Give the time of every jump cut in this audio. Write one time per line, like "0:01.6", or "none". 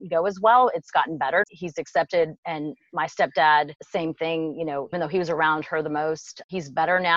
0:01.4
0:04.9